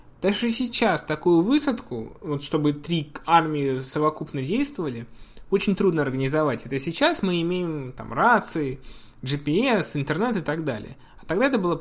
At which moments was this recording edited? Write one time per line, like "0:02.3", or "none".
none